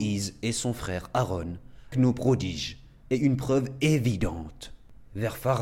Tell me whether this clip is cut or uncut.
cut